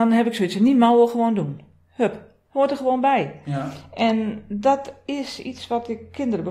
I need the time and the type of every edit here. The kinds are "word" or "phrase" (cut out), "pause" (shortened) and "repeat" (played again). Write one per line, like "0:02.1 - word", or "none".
none